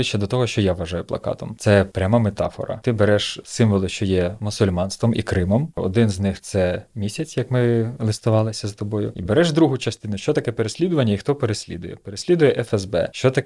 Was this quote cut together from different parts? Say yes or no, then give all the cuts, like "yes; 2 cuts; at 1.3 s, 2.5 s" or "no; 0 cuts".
no; 0 cuts